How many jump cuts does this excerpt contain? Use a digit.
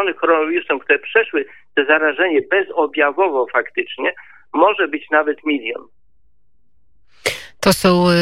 0